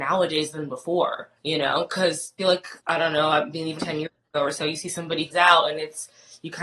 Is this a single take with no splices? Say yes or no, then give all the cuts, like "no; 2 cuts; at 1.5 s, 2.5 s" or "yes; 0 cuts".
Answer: no; 5 cuts; at 1.4 s, 2.4 s, 2.8 s, 3.8 s, 5.3 s